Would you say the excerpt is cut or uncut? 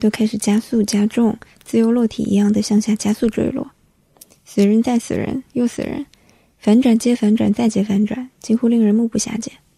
uncut